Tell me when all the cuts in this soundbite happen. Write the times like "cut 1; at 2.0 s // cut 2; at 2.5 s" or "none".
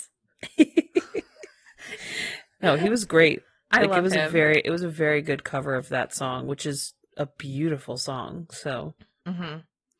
none